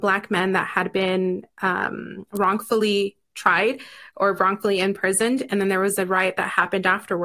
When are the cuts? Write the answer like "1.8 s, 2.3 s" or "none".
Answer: none